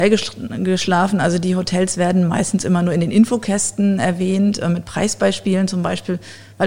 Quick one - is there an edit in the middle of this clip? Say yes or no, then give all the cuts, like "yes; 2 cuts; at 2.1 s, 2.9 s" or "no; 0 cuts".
no; 0 cuts